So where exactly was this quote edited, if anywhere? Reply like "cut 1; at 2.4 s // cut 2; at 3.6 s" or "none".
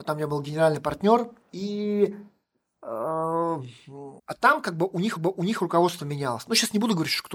cut 1; at 1.5 s // cut 2; at 4.2 s // cut 3; at 5.2 s